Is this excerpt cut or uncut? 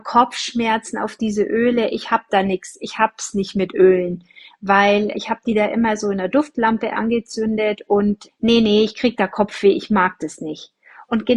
cut